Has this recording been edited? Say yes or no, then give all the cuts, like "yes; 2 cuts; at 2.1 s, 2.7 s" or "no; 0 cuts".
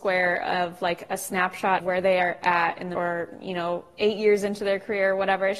yes; 2 cuts; at 1.8 s, 2.9 s